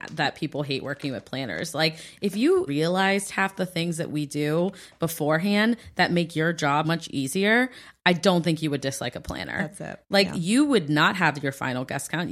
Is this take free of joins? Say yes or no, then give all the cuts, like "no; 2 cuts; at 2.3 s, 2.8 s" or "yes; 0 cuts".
no; 2 cuts; at 2.7 s, 6.8 s